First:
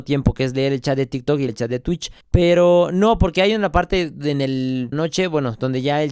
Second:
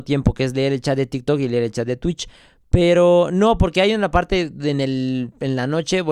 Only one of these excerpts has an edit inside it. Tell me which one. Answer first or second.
first